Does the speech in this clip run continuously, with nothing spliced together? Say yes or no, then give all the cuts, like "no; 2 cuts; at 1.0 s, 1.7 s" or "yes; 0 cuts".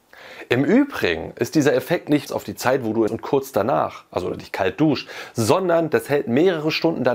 no; 2 cuts; at 2.3 s, 3.1 s